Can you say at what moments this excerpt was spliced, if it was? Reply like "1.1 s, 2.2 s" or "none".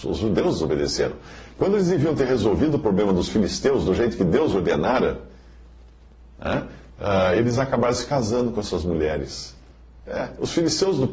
none